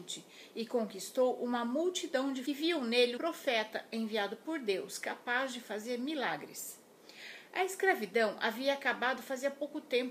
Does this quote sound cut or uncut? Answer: cut